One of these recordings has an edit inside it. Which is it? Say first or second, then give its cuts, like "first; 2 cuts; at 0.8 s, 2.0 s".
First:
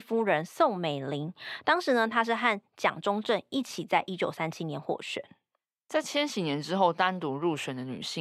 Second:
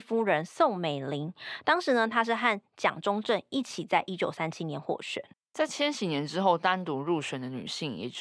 second; 1 cut; at 5.3 s